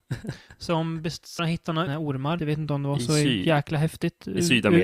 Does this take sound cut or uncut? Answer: cut